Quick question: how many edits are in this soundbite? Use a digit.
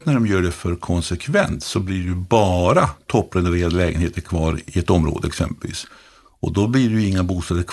0